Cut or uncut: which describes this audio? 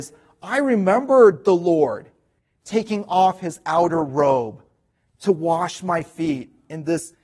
uncut